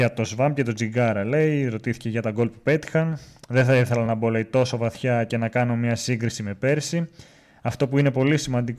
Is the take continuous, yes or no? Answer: yes